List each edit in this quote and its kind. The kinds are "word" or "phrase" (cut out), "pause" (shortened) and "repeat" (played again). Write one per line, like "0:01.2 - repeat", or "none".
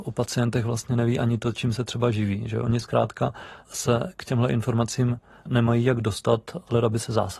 none